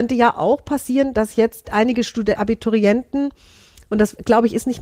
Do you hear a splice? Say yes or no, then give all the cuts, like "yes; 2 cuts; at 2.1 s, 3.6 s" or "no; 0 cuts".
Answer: yes; 2 cuts; at 1.6 s, 2.4 s